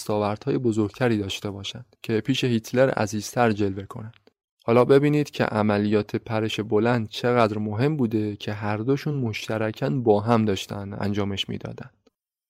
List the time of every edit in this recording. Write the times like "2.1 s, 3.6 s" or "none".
none

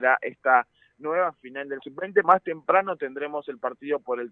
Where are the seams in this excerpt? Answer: 1.8 s, 2.2 s

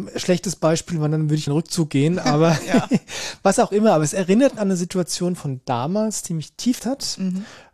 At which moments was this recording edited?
1.5 s, 4.6 s, 6.8 s

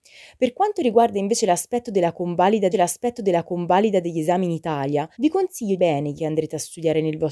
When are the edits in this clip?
2.7 s, 5.1 s, 5.8 s, 6.2 s

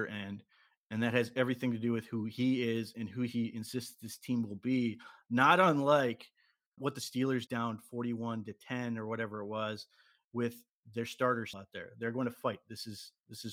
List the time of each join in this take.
6.8 s, 7.5 s, 11.5 s

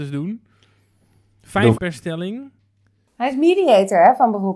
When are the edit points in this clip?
1.7 s

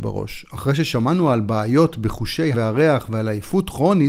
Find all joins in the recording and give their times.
2.5 s

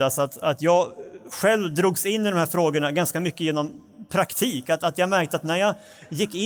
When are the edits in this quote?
none

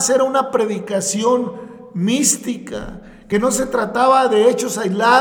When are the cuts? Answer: none

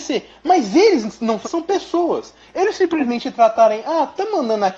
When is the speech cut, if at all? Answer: 1.4 s

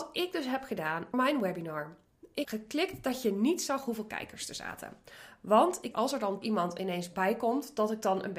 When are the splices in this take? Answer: 1.1 s, 2.4 s, 5.9 s, 6.4 s

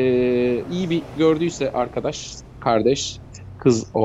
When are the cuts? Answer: 1.2 s, 2.5 s

